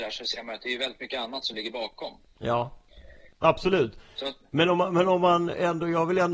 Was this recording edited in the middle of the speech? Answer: no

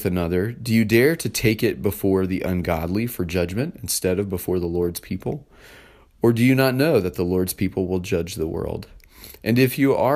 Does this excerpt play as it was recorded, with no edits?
yes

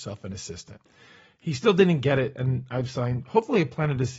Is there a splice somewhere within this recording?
no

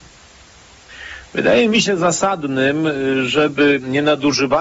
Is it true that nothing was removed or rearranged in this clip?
yes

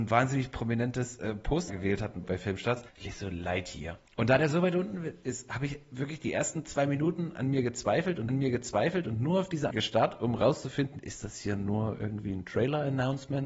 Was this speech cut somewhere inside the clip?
yes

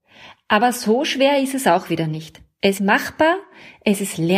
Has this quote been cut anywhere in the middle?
yes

